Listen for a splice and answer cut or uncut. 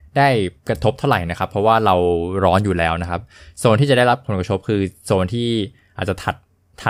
uncut